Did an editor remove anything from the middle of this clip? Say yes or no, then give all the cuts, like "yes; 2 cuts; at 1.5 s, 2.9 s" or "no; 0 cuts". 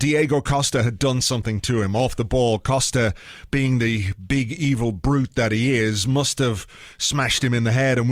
no; 0 cuts